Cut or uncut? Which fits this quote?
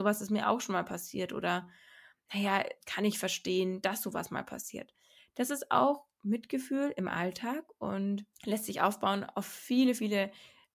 cut